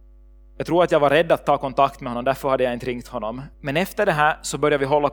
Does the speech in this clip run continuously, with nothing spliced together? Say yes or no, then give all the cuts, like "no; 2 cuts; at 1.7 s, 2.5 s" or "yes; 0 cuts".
no; 1 cut; at 3.5 s